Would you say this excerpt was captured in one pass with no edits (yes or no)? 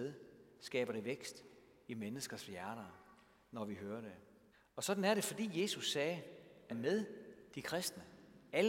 no